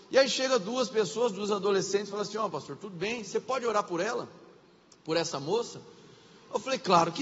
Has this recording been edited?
no; 0 cuts

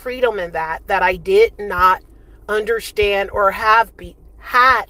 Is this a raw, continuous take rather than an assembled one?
yes; 0 cuts

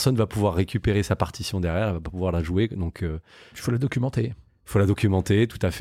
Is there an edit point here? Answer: no; 0 cuts

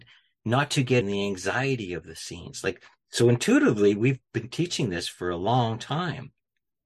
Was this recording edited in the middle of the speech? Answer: yes; 1 cut; at 1.0 s

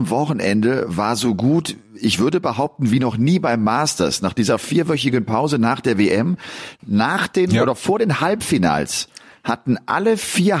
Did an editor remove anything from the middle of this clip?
no; 0 cuts

